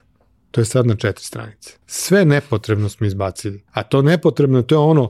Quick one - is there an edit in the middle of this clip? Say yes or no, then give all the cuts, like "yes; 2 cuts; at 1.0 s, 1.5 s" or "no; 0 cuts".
yes; 2 cuts; at 1.8 s, 3.7 s